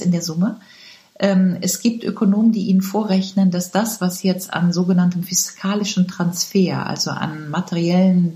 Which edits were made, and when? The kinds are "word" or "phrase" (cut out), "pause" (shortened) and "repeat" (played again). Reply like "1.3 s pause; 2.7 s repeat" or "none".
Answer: none